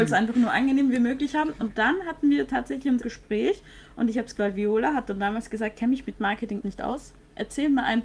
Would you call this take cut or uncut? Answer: cut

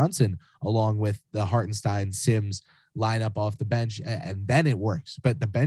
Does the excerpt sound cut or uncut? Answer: uncut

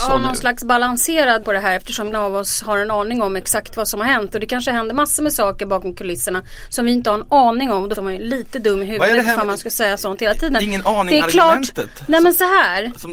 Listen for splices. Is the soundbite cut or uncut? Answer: cut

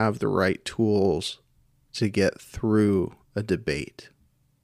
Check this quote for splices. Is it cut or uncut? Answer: uncut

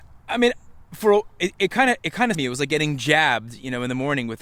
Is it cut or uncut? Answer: cut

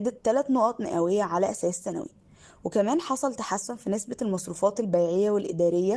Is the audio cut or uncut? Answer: uncut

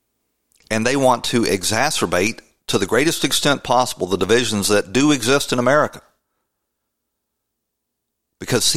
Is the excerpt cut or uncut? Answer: uncut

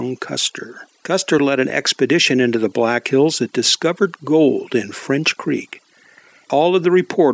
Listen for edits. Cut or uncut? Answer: uncut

